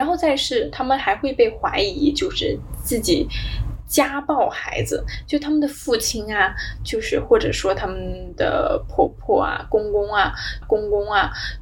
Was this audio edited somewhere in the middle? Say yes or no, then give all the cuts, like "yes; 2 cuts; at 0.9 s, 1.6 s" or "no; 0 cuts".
yes; 1 cut; at 10.6 s